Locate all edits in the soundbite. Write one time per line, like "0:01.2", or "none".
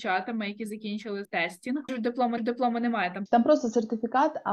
0:01.2
0:01.9
0:02.4
0:03.3